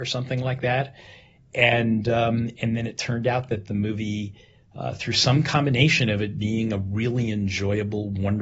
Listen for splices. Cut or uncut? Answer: uncut